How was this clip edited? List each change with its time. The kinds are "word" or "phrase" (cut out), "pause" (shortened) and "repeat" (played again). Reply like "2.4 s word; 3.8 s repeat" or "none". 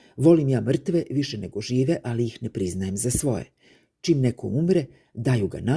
none